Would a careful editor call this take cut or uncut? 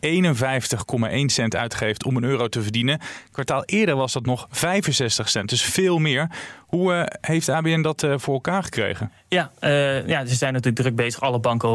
uncut